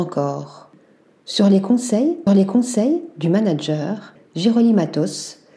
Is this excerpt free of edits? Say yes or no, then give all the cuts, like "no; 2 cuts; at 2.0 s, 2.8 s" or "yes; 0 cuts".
no; 2 cuts; at 2.3 s, 4.2 s